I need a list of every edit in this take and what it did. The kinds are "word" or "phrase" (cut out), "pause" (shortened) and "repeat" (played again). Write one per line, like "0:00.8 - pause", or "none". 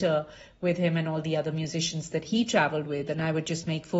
none